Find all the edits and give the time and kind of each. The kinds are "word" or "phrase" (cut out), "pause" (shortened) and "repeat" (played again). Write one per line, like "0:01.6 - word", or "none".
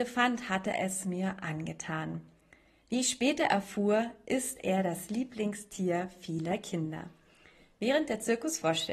none